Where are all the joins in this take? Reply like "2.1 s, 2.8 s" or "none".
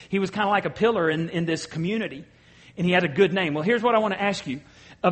none